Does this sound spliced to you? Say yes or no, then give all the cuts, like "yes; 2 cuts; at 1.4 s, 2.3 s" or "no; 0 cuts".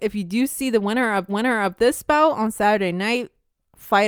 yes; 1 cut; at 1.3 s